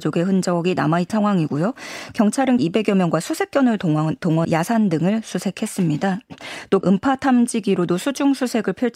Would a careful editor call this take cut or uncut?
cut